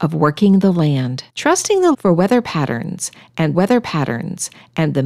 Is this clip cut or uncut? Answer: cut